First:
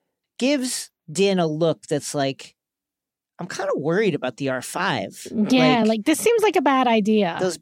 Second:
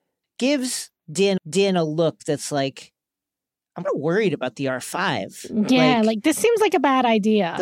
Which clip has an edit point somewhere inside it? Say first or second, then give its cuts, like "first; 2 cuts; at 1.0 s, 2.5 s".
second; 2 cuts; at 1.4 s, 3.8 s